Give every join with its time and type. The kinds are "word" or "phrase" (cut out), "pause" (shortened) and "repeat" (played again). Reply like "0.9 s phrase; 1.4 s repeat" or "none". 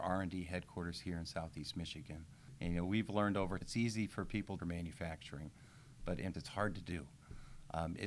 3.6 s word; 4.6 s phrase; 6.3 s word